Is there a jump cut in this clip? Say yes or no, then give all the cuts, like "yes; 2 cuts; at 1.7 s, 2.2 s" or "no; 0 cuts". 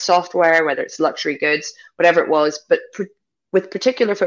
no; 0 cuts